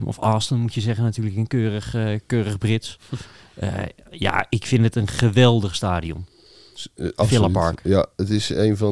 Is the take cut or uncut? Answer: uncut